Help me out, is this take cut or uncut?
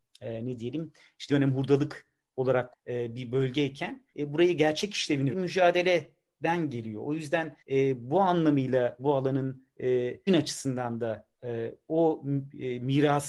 cut